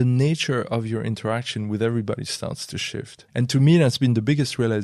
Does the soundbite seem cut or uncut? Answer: cut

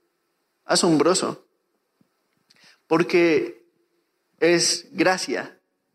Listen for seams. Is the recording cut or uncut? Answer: uncut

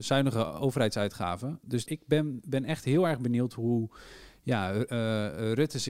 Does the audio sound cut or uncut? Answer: cut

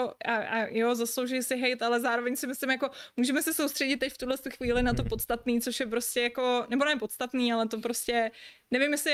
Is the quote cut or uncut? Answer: uncut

